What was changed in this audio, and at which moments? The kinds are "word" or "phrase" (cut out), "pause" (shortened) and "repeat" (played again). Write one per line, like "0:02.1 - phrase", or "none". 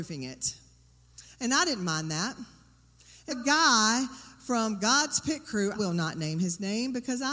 0:03.3 - word
0:05.7 - word